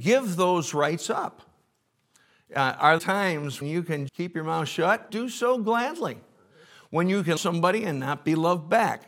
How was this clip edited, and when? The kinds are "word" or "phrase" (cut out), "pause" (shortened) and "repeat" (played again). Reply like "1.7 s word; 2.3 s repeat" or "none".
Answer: 3.0 s word; 3.6 s word; 4.1 s word; 5.1 s word; 7.4 s word